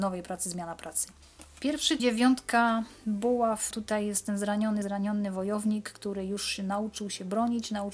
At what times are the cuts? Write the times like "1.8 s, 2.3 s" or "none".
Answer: 2.0 s, 3.7 s, 4.8 s